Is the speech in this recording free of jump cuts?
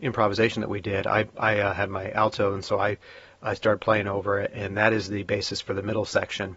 yes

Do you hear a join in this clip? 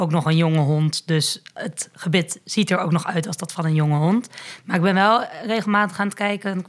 no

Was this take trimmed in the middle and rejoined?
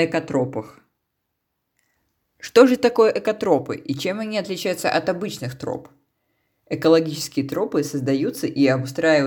no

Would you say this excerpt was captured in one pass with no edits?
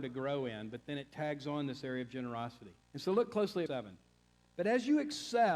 no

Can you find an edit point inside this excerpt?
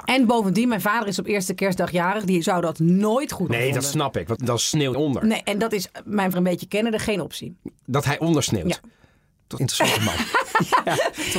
yes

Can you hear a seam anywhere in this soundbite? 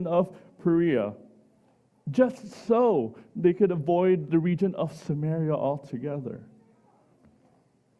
no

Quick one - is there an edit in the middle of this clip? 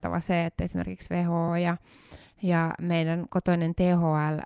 no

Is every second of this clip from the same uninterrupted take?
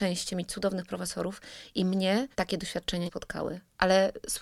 no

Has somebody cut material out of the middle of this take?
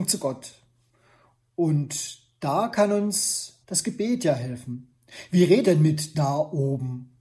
yes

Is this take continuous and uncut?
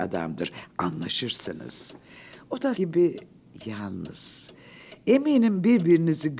no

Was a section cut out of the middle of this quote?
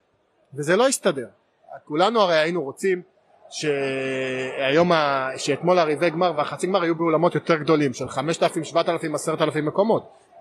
no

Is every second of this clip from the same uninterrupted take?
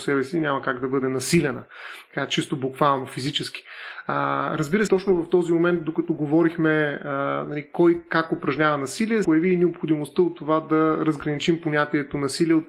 no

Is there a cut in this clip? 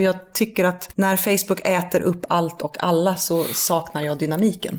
no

